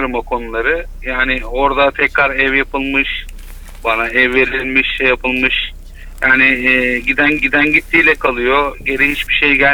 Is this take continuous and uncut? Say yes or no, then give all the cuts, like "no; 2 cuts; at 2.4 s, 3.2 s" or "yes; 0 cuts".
no; 1 cut; at 7.4 s